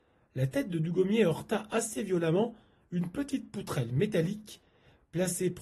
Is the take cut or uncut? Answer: uncut